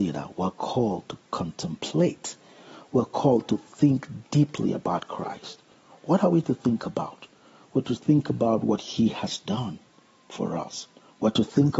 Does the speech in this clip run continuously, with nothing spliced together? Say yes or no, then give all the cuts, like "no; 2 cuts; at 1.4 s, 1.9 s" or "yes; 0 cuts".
yes; 0 cuts